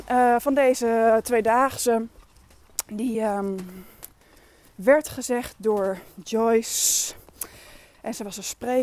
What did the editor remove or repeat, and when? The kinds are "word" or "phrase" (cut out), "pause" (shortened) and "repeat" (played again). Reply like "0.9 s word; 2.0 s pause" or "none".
none